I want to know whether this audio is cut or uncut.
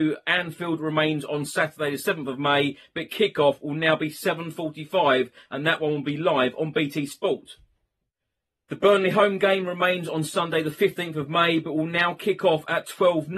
uncut